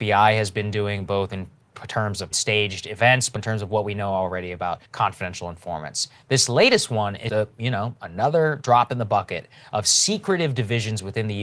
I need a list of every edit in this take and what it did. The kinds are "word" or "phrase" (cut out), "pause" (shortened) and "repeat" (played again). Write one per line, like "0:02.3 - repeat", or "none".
0:02.3 - phrase
0:03.4 - word
0:04.9 - pause
0:07.3 - word